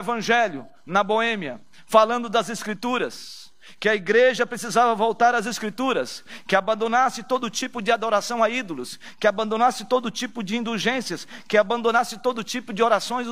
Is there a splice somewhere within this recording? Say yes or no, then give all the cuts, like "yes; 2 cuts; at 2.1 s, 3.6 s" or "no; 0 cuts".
no; 0 cuts